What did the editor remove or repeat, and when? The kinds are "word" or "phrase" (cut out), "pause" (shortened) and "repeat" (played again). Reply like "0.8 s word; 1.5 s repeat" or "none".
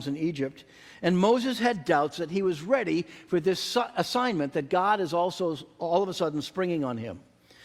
none